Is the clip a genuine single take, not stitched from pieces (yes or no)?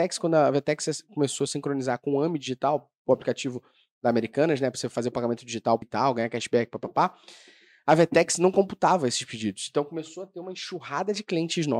no